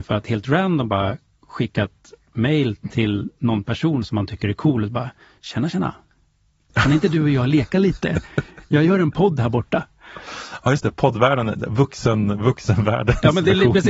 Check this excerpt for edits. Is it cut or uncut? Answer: uncut